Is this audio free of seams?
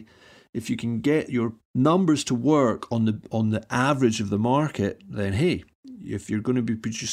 no; 1 cut; at 1.6 s

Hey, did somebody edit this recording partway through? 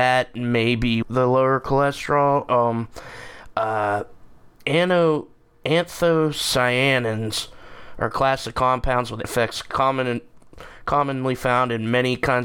yes; 2 cuts; at 1.0 s, 9.2 s

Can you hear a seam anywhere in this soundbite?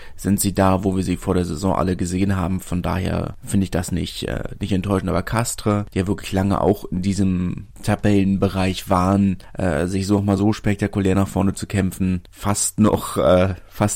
no; 0 cuts

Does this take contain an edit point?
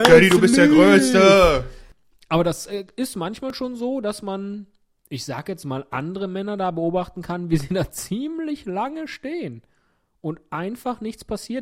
no; 0 cuts

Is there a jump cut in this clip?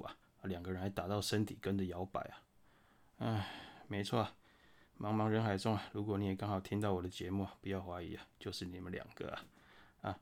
no; 0 cuts

